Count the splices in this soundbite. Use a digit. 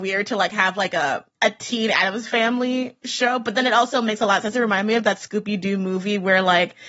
1